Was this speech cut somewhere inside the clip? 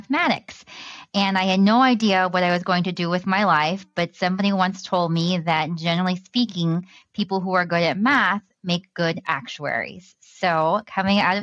no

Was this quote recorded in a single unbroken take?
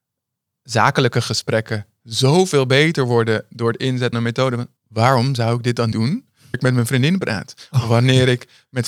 no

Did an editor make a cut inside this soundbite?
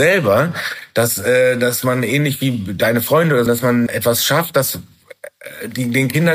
yes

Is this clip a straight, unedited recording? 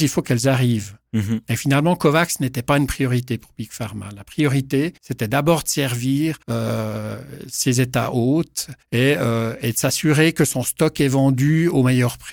no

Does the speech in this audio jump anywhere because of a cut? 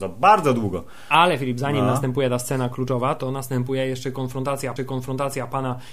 yes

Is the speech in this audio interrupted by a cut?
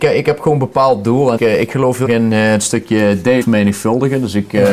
yes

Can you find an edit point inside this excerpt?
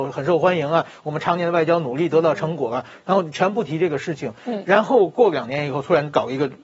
no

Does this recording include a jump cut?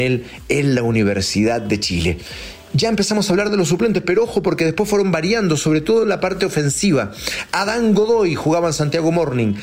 no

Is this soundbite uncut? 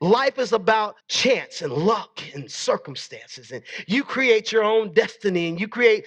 no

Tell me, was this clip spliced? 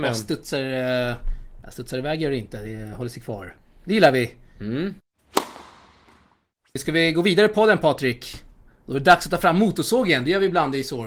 no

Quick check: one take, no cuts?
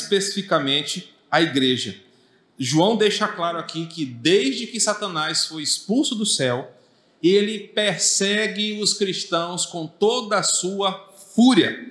yes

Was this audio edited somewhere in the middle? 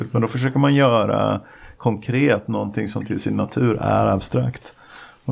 no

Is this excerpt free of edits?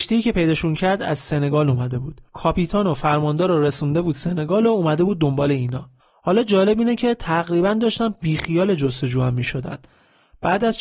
no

